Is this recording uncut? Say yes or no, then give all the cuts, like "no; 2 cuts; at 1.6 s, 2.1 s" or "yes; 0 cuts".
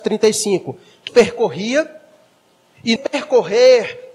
no; 2 cuts; at 1.1 s, 3.0 s